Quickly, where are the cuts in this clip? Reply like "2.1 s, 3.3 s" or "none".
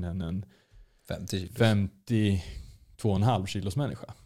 none